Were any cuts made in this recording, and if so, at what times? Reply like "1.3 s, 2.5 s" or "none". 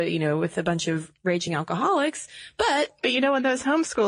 none